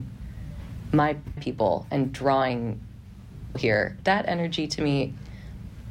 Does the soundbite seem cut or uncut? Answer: cut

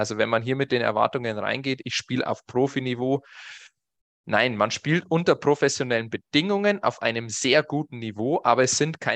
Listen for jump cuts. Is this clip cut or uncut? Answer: uncut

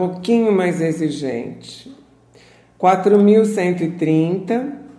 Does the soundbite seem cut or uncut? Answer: uncut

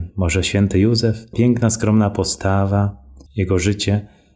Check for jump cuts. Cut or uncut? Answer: cut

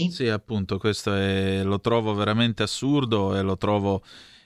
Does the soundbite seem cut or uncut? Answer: uncut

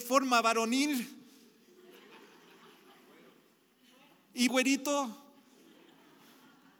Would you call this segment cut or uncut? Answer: cut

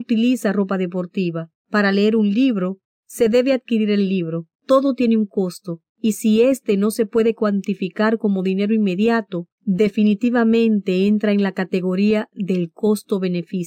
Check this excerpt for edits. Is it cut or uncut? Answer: cut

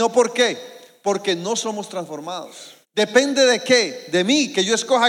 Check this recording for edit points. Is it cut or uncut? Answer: cut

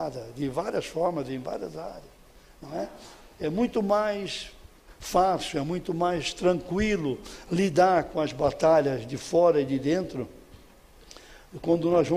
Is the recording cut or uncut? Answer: uncut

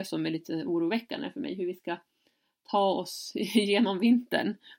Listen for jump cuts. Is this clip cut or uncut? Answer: uncut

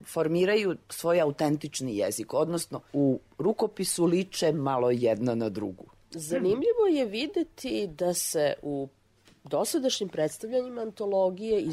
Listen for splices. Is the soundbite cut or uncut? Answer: cut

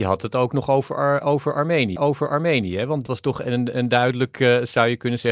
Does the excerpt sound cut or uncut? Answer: cut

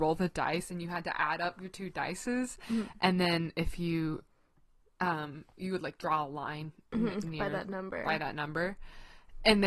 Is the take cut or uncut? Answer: uncut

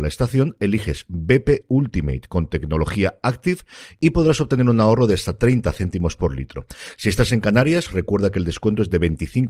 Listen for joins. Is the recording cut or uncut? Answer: uncut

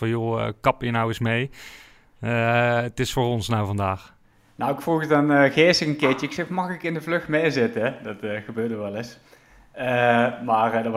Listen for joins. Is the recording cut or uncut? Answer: uncut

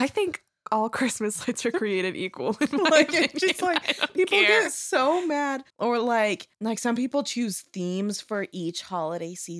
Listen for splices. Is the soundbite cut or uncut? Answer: cut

